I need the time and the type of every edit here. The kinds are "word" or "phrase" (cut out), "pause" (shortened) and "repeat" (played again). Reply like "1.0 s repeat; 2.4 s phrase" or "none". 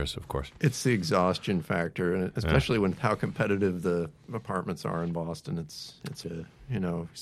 6.2 s word